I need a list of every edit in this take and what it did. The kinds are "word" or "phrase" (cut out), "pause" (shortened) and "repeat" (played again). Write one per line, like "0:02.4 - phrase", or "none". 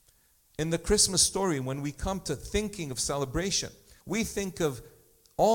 0:04.0 - pause